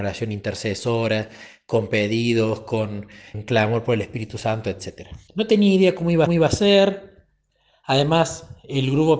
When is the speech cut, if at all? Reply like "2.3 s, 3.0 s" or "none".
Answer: 3.3 s, 5.3 s, 6.3 s